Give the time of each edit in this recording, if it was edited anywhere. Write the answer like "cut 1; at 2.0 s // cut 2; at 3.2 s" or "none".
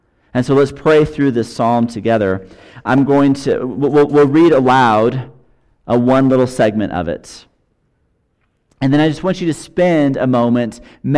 none